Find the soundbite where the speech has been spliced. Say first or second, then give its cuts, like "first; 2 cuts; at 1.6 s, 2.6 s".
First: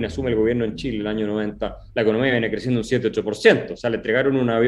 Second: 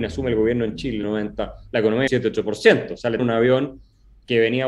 second; 3 cuts; at 1.0 s, 2.1 s, 3.2 s